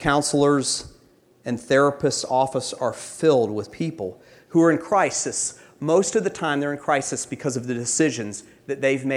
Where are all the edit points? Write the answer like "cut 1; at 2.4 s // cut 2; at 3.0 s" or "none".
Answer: none